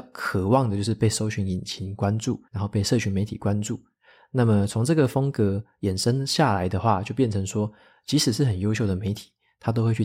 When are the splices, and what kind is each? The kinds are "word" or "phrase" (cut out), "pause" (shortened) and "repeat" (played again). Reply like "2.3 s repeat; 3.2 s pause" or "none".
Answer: 2.5 s pause